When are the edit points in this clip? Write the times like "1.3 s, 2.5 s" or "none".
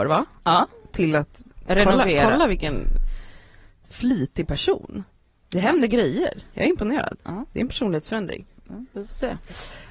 none